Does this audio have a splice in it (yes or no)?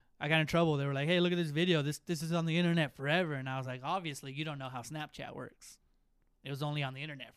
no